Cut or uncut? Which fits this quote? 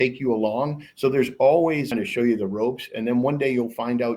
cut